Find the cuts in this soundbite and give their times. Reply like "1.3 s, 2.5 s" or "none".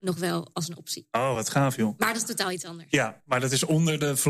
none